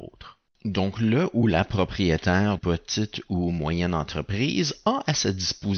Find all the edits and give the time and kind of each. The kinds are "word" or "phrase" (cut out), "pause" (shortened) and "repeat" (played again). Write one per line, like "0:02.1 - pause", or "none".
0:02.6 - word